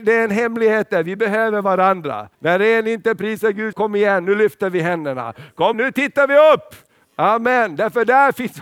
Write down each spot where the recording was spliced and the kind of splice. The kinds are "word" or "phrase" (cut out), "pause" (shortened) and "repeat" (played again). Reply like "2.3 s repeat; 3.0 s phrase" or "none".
2.3 s pause; 3.7 s phrase; 5.7 s word